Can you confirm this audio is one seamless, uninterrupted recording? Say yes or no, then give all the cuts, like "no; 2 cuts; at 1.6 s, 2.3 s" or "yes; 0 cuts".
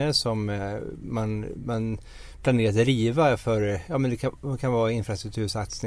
yes; 0 cuts